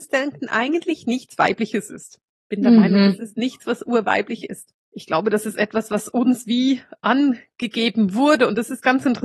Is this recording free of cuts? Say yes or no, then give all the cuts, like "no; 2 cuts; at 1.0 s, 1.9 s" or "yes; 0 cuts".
no; 1 cut; at 4.8 s